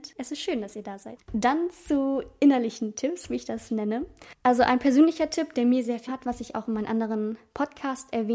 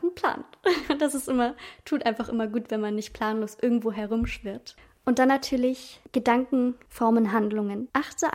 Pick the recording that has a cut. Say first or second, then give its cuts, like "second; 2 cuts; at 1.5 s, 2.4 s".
first; 1 cut; at 6.1 s